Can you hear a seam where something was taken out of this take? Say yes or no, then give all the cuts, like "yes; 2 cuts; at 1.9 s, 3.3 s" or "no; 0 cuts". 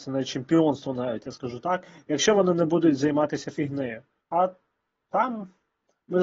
yes; 1 cut; at 4.2 s